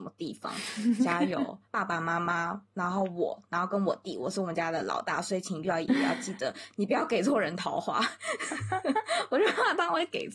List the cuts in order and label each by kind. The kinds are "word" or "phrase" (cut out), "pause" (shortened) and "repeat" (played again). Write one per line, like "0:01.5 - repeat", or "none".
0:01.7 - pause